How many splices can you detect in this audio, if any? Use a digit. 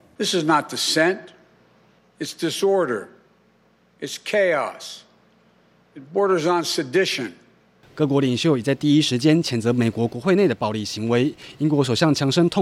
0